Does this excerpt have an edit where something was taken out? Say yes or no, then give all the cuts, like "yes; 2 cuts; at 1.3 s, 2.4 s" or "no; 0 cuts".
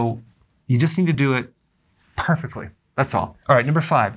no; 0 cuts